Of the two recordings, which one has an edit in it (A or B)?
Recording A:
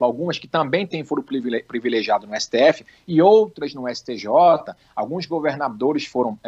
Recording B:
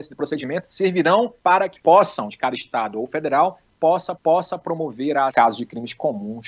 B